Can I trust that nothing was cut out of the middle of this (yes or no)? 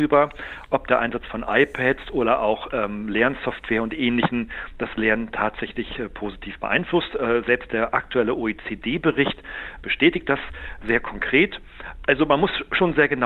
yes